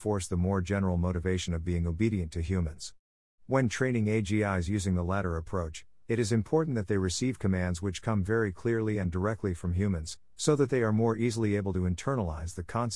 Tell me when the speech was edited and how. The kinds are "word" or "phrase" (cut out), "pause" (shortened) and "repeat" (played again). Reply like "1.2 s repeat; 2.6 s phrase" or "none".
none